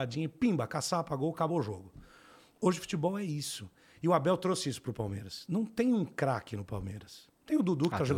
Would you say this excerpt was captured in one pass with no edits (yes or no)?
yes